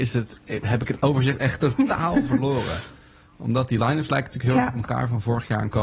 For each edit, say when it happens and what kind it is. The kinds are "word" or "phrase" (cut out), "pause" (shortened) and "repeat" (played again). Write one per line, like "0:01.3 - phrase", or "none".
none